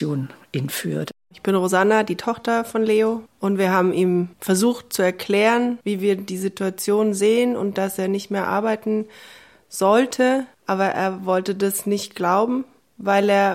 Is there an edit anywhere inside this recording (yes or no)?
yes